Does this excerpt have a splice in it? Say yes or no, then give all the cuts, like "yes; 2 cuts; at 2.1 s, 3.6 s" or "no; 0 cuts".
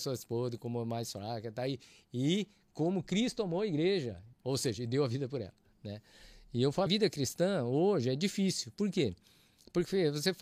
yes; 2 cuts; at 4.3 s, 6.9 s